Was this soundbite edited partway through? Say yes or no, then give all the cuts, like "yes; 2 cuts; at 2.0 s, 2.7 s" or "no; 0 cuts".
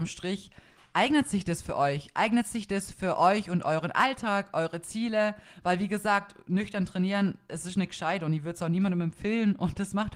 no; 0 cuts